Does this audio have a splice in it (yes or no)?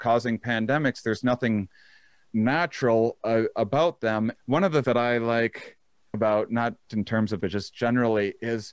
yes